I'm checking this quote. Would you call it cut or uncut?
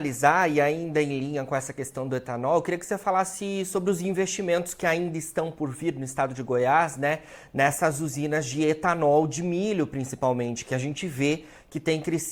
uncut